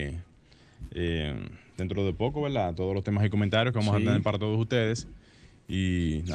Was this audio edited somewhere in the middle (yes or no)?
no